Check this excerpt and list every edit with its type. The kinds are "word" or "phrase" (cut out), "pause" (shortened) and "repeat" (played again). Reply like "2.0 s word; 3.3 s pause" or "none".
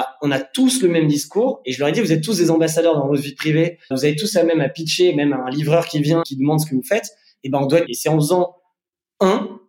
3.9 s word; 6.2 s word; 7.9 s phrase